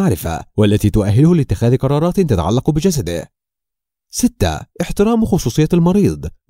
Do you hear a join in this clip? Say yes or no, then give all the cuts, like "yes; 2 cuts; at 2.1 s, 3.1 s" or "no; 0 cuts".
yes; 1 cut; at 4.7 s